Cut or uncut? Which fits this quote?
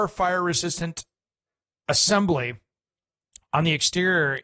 uncut